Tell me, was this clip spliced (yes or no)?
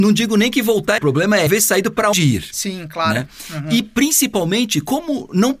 yes